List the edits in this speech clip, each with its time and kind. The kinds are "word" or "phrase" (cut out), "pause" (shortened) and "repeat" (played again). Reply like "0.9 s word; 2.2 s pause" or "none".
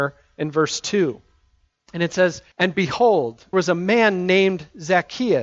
2.5 s pause; 3.5 s word